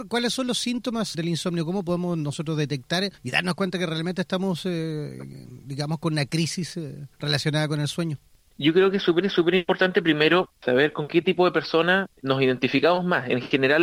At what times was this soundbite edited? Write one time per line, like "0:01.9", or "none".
0:01.1
0:03.2
0:07.1
0:09.2